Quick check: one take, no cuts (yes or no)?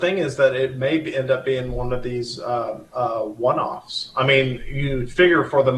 no